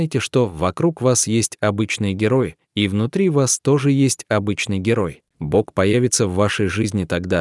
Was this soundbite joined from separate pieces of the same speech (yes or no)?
yes